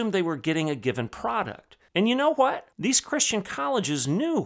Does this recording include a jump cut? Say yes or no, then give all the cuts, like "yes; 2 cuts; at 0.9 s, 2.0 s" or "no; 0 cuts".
yes; 2 cuts; at 1.9 s, 2.7 s